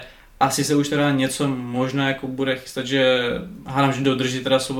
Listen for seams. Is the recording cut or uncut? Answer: uncut